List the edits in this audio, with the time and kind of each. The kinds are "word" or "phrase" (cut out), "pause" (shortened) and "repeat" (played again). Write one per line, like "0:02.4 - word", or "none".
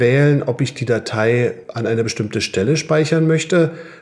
none